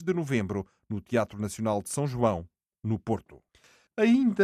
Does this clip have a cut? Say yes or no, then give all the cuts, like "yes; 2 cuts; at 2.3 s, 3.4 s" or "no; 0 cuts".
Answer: no; 0 cuts